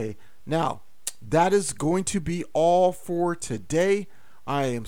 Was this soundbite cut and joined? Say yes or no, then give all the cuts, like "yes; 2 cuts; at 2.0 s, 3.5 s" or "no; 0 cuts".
no; 0 cuts